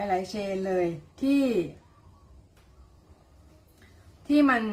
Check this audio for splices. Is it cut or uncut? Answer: cut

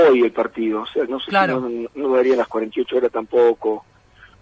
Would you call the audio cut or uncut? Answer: cut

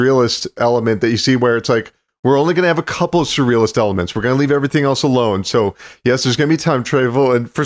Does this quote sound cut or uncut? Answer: uncut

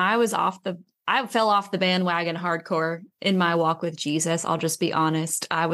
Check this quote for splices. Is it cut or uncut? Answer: uncut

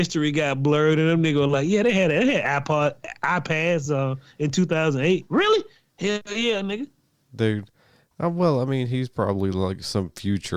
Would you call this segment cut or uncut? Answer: uncut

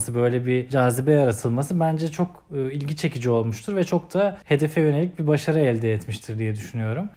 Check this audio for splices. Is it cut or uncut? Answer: uncut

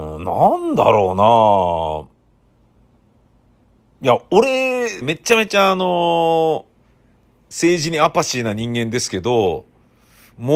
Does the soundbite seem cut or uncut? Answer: cut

